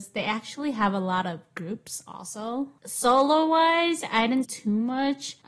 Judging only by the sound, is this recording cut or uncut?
cut